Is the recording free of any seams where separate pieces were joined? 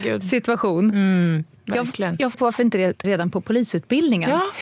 no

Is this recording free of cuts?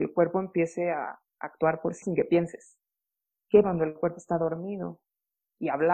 no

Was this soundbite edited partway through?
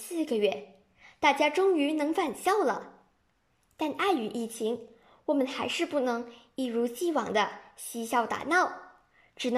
no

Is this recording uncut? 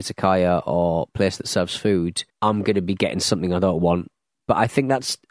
no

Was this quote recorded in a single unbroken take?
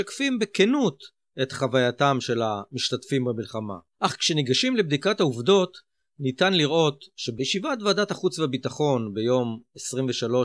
no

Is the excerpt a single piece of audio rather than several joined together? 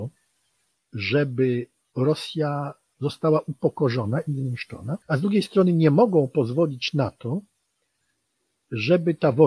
no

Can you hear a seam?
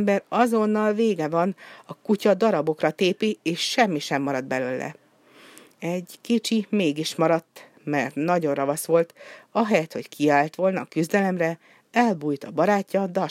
no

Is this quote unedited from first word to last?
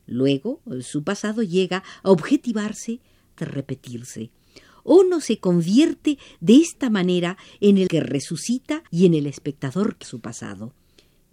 no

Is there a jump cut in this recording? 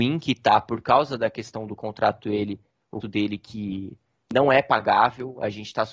yes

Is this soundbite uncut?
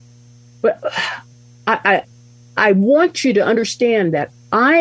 yes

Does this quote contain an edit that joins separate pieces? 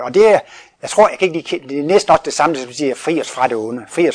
no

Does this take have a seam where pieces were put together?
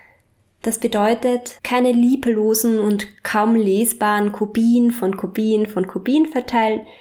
yes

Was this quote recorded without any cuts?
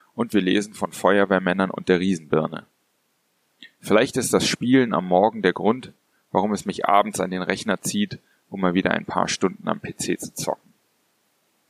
yes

